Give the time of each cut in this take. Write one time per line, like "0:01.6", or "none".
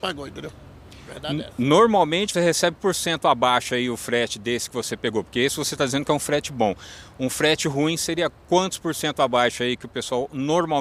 0:02.3
0:02.8